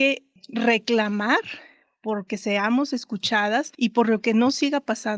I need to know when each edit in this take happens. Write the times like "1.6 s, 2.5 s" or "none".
none

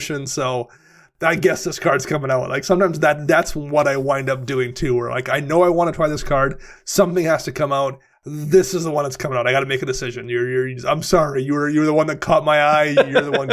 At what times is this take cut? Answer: 8.1 s

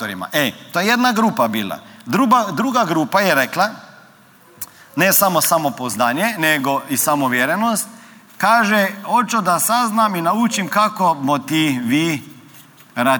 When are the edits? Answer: none

